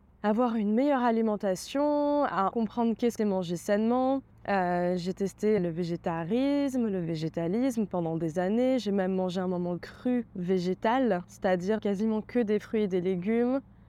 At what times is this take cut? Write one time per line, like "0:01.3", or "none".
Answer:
0:02.5
0:03.2
0:04.3
0:05.6
0:09.8
0:10.3
0:11.8